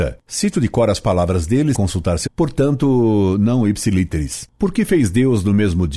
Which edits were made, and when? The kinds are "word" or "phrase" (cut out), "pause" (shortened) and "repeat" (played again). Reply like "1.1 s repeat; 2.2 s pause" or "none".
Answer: 1.7 s word; 2.3 s word